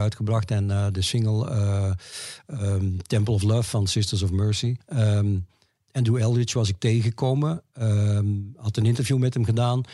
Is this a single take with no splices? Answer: yes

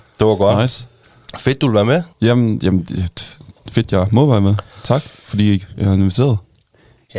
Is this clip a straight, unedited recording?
no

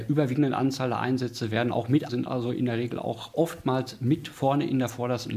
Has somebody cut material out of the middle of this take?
yes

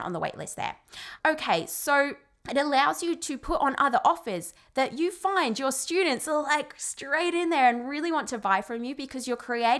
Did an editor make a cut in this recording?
no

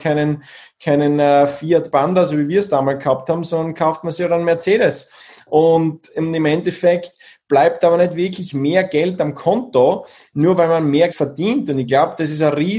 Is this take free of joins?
no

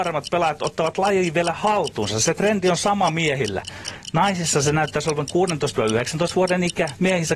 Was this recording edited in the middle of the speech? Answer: no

